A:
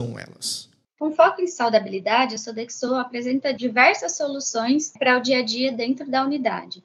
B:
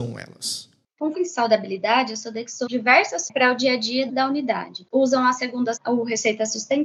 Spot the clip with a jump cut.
B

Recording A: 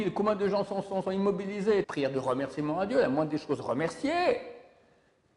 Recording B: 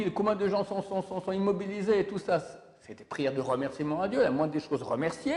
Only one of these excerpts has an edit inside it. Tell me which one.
A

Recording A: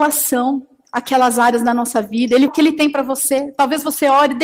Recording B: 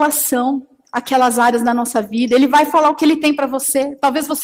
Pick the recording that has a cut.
A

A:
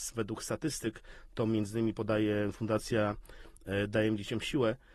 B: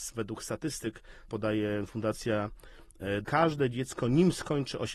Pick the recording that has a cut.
B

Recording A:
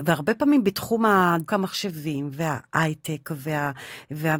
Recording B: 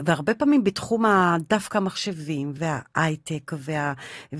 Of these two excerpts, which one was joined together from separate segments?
A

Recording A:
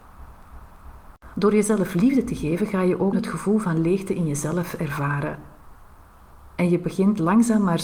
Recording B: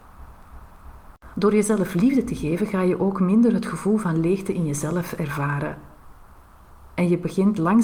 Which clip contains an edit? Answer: A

